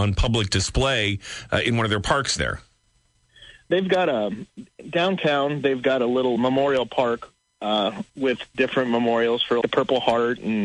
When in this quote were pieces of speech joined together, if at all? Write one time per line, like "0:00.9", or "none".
0:06.4
0:08.1
0:09.6